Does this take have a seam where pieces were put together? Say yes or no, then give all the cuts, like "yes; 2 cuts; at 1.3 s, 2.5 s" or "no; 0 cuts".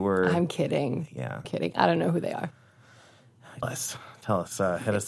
yes; 2 cuts; at 1.4 s, 3.6 s